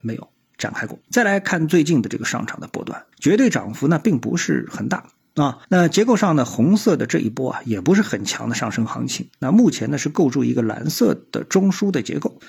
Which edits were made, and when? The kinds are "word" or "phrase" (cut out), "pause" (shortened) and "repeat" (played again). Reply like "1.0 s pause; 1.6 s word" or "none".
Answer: 1.0 s pause; 3.1 s pause; 5.6 s pause